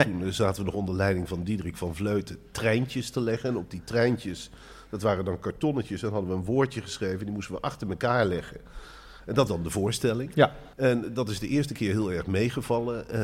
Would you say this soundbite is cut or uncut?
cut